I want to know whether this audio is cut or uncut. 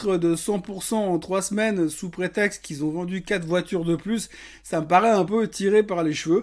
uncut